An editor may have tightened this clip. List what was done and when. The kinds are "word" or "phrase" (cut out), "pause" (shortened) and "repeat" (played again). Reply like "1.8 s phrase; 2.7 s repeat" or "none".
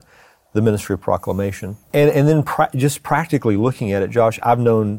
1.8 s pause